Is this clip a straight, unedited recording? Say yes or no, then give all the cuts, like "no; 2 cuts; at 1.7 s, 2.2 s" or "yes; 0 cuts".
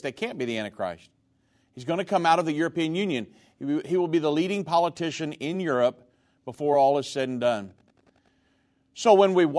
yes; 0 cuts